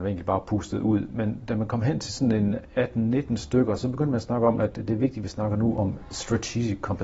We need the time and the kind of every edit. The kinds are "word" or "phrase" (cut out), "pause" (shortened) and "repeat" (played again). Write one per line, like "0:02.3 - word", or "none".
none